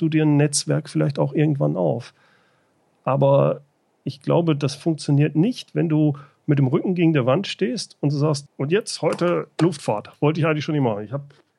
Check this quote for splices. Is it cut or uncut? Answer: cut